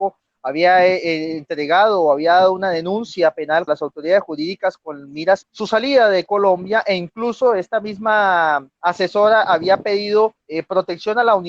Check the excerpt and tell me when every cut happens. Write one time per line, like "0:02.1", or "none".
0:03.7
0:05.4
0:08.7
0:10.4